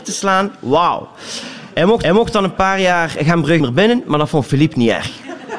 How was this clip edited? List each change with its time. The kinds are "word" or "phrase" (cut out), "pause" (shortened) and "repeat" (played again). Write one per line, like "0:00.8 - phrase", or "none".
0:02.0 - repeat
0:03.6 - word